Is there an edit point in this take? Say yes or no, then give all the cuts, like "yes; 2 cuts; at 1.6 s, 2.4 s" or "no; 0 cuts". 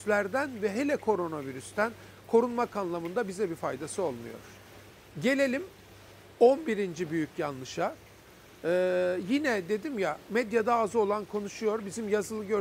no; 0 cuts